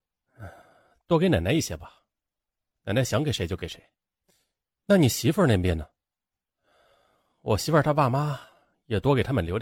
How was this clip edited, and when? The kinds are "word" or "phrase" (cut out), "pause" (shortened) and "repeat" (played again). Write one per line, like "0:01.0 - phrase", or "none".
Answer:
none